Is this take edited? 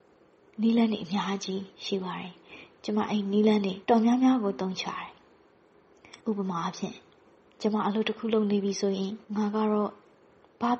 yes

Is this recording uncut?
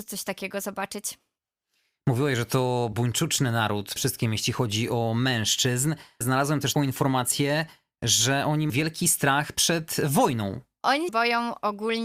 no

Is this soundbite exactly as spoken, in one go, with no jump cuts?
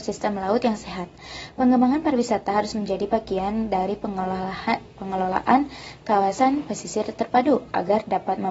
yes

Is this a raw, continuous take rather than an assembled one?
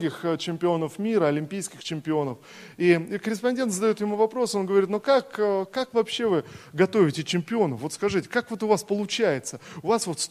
yes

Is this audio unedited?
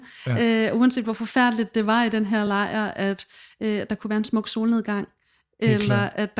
yes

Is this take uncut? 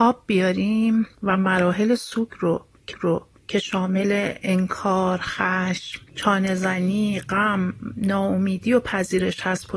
no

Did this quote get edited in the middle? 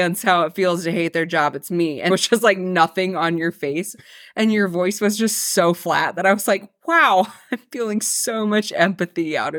yes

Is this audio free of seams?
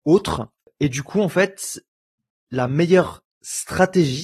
yes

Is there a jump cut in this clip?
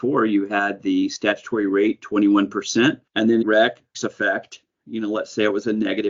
yes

